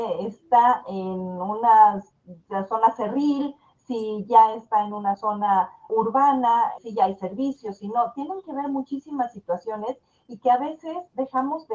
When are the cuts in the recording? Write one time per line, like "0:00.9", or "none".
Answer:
0:05.9
0:06.8